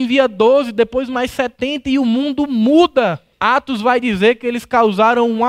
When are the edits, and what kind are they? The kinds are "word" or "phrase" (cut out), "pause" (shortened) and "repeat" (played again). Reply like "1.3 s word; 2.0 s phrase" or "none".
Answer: 3.3 s pause